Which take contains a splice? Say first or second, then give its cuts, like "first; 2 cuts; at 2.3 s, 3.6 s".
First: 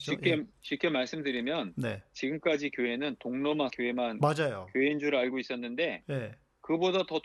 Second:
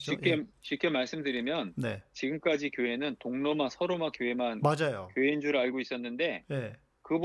first; 1 cut; at 3.7 s